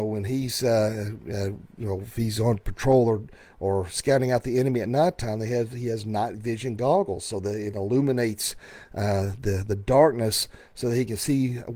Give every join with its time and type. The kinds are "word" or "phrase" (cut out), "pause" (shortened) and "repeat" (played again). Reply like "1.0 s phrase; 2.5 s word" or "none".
none